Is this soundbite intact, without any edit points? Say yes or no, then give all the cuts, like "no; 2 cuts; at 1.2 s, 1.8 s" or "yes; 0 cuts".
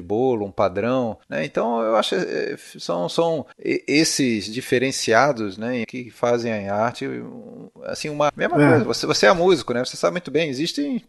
no; 4 cuts; at 1.2 s, 3.5 s, 5.8 s, 8.3 s